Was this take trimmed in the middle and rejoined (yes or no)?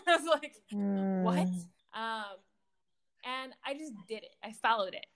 yes